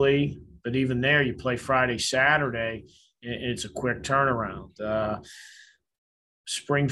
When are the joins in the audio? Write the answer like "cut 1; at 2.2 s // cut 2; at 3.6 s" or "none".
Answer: none